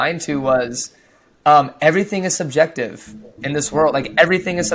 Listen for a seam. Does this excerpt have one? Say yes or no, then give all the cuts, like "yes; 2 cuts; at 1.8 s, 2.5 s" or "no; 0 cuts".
no; 0 cuts